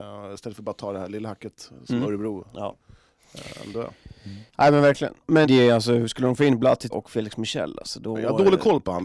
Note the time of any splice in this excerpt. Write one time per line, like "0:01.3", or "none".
0:04.5
0:05.4
0:06.9